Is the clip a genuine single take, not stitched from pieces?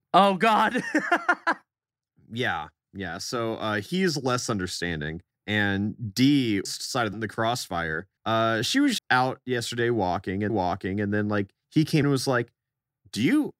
no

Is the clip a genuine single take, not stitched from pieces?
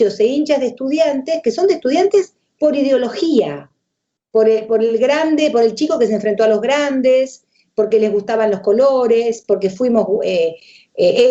yes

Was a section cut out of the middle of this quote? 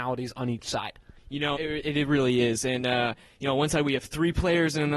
yes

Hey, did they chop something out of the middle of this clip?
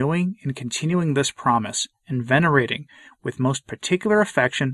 no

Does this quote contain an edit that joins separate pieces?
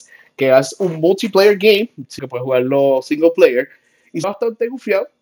yes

